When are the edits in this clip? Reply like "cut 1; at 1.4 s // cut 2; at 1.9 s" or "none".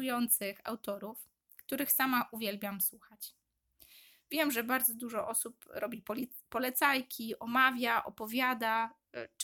none